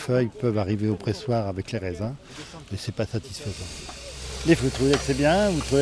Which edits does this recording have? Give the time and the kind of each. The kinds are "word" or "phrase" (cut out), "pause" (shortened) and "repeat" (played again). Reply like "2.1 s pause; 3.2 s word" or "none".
4.6 s word